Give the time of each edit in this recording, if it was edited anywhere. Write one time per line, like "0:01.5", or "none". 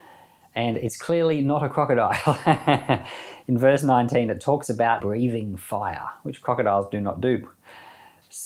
0:05.0